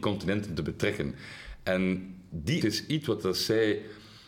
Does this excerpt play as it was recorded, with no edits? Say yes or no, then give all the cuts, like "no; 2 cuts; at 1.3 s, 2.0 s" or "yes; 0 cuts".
no; 1 cut; at 2.6 s